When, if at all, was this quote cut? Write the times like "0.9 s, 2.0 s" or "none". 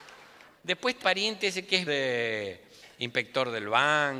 1.0 s, 1.9 s